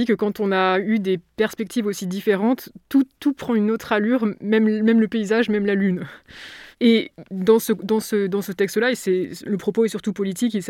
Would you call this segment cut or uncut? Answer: cut